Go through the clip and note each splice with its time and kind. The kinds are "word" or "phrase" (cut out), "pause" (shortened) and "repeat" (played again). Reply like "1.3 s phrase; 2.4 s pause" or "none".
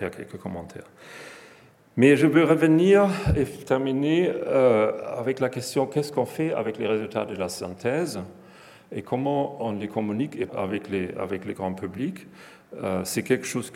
10.5 s word